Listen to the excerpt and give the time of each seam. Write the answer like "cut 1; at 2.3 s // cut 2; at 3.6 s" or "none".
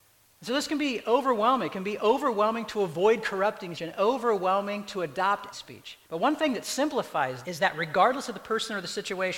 cut 1; at 3.7 s // cut 2; at 5.5 s // cut 3; at 6.0 s // cut 4; at 7.4 s